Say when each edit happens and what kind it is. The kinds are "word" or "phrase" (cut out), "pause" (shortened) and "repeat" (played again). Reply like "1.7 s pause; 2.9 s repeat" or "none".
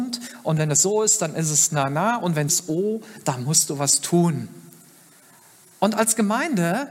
2.5 s word